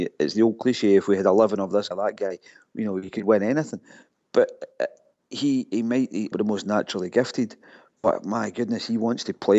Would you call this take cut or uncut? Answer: cut